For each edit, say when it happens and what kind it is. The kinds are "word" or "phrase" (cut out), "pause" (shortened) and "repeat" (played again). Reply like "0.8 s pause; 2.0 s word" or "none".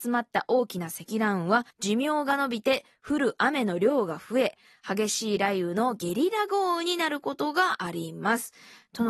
1.7 s pause